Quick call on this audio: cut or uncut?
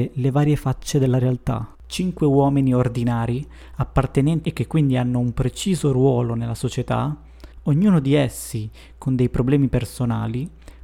cut